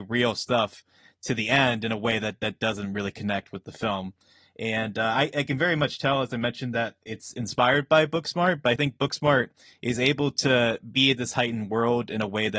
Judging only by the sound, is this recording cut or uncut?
uncut